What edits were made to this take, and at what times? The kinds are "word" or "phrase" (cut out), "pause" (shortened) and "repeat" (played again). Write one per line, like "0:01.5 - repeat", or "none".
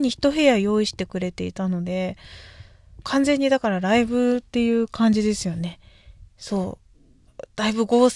0:03.0 - phrase